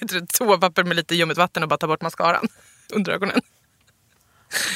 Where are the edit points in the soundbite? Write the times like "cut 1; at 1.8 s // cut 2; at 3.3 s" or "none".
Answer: none